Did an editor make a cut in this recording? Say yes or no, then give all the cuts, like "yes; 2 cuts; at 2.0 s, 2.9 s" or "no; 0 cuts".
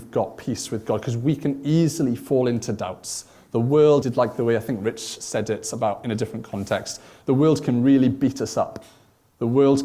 yes; 1 cut; at 4.0 s